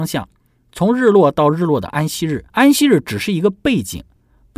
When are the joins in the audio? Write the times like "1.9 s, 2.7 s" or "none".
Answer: 2.5 s

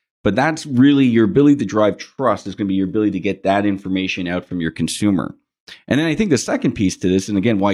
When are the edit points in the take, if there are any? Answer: none

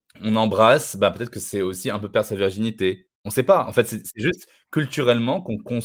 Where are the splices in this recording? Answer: 3.1 s

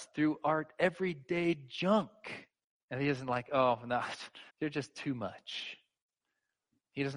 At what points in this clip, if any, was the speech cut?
2.6 s, 4.5 s

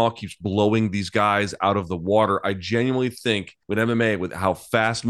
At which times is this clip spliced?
3.6 s

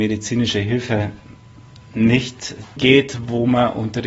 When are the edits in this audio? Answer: 2.8 s

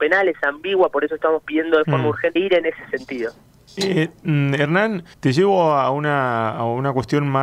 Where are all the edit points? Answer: 2.4 s, 5.1 s

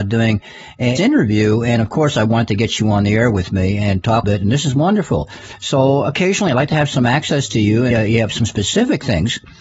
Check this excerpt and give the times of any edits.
1.0 s, 4.2 s, 7.9 s

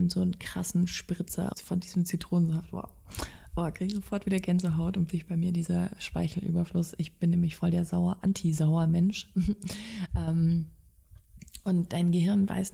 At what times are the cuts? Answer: 1.5 s, 5.1 s

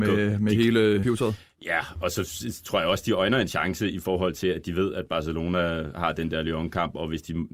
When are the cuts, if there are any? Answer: 1.0 s

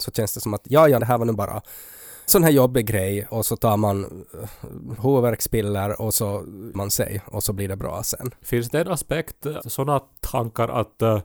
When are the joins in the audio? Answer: 1.0 s, 2.3 s, 3.3 s, 5.0 s, 6.7 s, 9.6 s

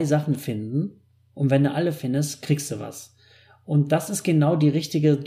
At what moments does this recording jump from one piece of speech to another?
none

